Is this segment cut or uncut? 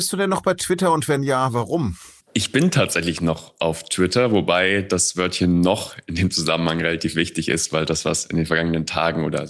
cut